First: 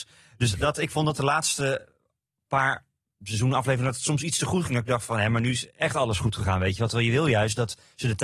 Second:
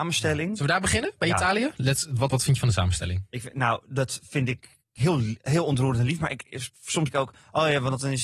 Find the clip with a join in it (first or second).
second